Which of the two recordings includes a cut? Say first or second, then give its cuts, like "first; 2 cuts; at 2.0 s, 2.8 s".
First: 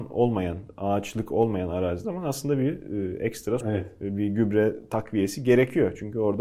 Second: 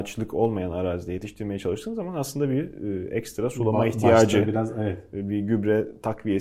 first; 2 cuts; at 2.0 s, 3.6 s